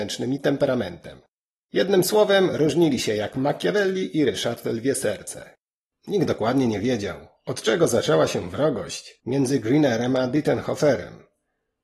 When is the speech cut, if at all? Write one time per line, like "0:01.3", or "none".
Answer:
none